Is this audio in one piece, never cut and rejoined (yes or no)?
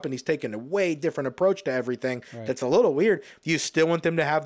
yes